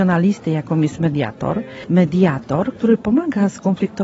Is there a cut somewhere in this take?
no; 0 cuts

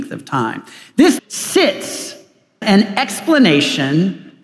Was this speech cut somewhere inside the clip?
yes; 2 cuts; at 1.2 s, 2.6 s

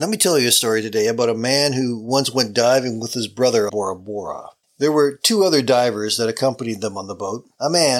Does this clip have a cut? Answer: yes; 2 cuts; at 3.7 s, 4.6 s

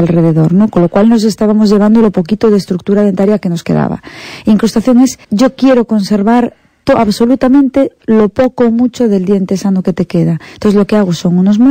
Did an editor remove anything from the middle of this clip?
yes; 1 cut; at 5.2 s

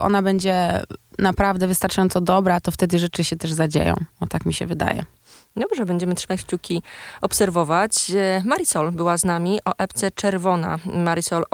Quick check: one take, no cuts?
yes; 0 cuts

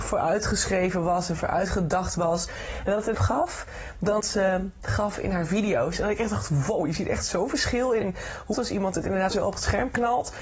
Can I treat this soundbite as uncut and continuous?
no; 5 cuts; at 3.1 s, 4.2 s, 8.0 s, 8.5 s, 9.3 s

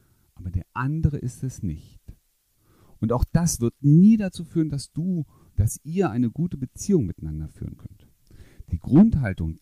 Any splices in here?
no; 0 cuts

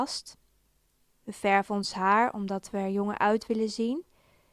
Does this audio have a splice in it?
no; 0 cuts

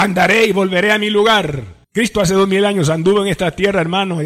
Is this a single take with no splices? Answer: no; 1 cut; at 1.8 s

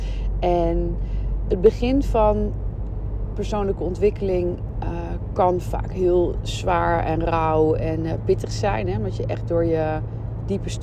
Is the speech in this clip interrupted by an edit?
no; 0 cuts

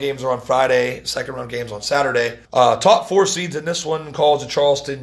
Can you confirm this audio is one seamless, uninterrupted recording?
no; 1 cut; at 2.4 s

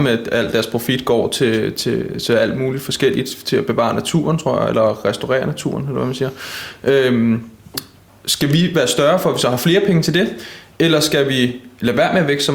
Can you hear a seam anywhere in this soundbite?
no; 0 cuts

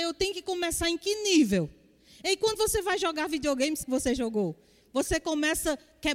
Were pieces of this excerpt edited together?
yes; 2 cuts; at 3.8 s, 4.2 s

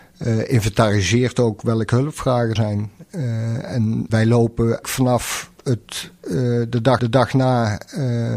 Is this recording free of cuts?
no; 4 cuts; at 2.6 s, 4.1 s, 4.8 s, 7.0 s

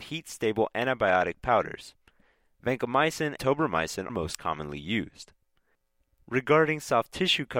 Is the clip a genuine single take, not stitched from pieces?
no; 2 cuts; at 3.4 s, 4.1 s

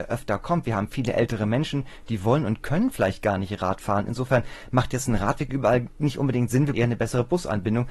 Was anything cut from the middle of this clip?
yes; 1 cut; at 6.7 s

